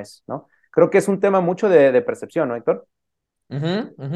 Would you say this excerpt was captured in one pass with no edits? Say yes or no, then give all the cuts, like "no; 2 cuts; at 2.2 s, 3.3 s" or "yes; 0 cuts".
yes; 0 cuts